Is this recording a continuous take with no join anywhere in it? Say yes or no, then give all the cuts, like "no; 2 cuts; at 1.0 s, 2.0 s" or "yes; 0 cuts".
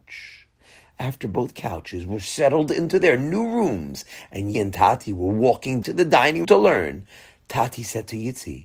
no; 3 cuts; at 4.5 s, 5.8 s, 6.4 s